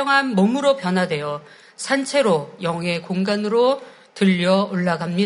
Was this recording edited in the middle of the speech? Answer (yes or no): no